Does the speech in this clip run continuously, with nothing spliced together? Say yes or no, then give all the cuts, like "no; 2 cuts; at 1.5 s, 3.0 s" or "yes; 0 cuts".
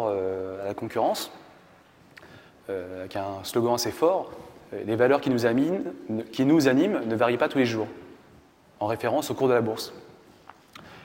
yes; 0 cuts